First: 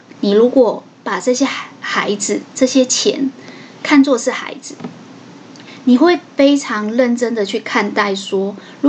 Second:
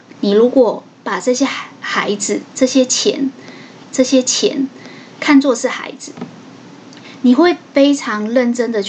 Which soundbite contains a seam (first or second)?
second